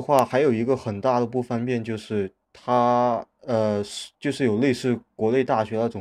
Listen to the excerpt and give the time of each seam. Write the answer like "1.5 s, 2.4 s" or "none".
4.1 s